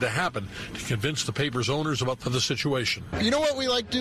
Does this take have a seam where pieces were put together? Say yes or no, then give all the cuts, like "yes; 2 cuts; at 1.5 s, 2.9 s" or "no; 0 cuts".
yes; 1 cut; at 2.2 s